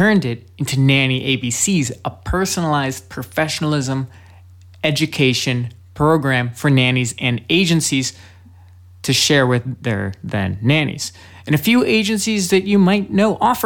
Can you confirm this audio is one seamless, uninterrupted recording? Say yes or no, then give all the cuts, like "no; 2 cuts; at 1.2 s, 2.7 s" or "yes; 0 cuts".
yes; 0 cuts